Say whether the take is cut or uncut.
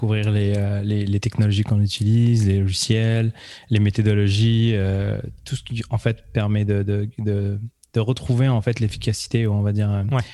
uncut